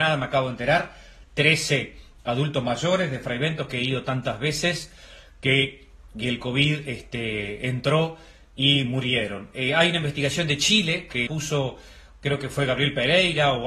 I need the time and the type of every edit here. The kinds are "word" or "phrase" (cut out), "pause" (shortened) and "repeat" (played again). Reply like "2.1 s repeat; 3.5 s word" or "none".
11.3 s word